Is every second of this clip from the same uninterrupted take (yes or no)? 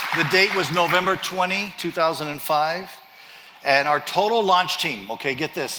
yes